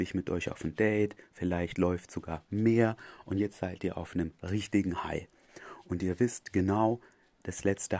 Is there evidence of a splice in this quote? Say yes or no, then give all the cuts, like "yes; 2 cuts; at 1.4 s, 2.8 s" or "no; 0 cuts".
no; 0 cuts